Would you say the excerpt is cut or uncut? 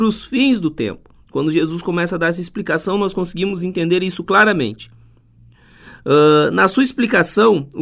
uncut